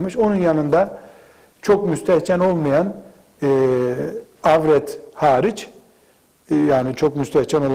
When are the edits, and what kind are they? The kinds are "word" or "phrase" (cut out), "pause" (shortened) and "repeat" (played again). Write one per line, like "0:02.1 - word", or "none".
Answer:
none